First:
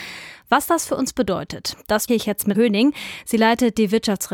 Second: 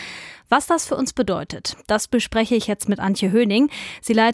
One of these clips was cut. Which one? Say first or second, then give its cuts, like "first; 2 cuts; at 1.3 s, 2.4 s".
first; 2 cuts; at 2.1 s, 2.5 s